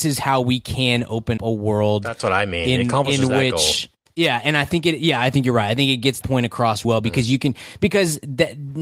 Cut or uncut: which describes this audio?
cut